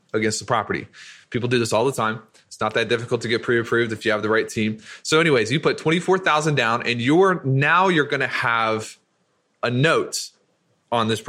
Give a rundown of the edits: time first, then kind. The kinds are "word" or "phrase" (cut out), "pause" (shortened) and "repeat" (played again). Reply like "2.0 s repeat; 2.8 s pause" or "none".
none